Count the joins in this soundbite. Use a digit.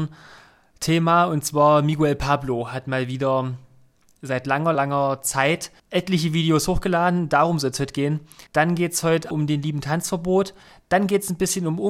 4